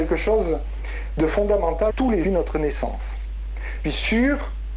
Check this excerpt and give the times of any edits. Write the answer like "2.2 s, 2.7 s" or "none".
1.9 s, 2.2 s, 3.8 s